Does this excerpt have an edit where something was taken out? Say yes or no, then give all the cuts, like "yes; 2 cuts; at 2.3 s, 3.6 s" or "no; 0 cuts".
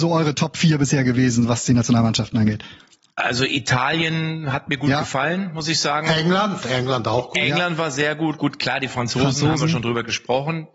no; 0 cuts